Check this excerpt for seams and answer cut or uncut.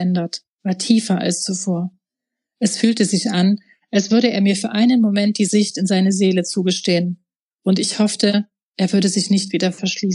uncut